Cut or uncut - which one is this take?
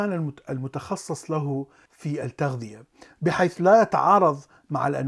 uncut